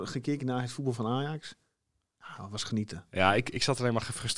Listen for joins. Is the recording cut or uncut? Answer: uncut